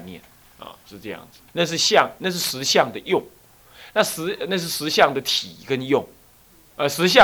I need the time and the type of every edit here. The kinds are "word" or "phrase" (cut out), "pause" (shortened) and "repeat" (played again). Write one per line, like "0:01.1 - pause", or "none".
0:01.5 - pause